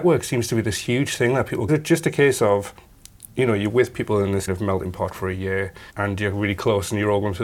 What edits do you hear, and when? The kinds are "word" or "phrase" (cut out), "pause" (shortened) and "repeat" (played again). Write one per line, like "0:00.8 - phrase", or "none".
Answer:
0:01.7 - phrase
0:04.5 - word
0:05.9 - pause